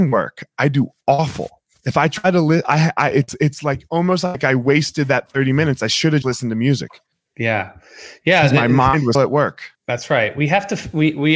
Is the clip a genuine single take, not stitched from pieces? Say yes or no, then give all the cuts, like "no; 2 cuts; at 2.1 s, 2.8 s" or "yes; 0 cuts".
no; 4 cuts; at 6.2 s, 7.1 s, 9.1 s, 9.8 s